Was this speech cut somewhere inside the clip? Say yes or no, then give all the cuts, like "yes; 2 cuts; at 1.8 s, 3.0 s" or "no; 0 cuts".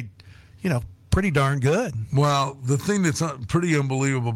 no; 0 cuts